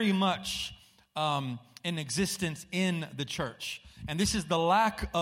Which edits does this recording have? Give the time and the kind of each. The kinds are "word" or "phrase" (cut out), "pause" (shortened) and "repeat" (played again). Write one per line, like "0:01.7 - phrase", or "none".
none